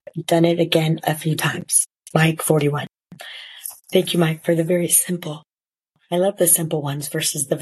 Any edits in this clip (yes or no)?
no